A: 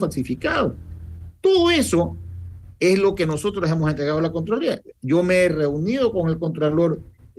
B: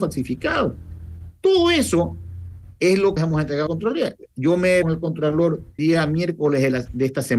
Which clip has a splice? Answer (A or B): B